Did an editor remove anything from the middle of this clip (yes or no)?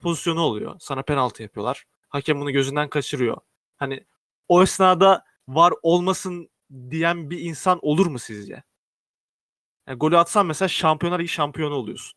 no